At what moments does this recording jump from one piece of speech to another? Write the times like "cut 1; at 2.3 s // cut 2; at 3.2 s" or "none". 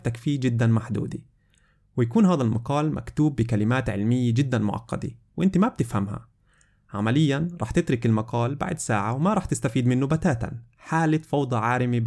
none